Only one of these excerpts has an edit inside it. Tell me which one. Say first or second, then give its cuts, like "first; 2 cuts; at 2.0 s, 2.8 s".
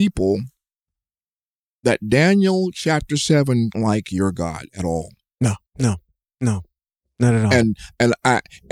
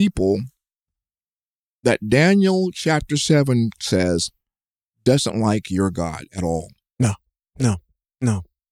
first; 2 cuts; at 3.7 s, 5.7 s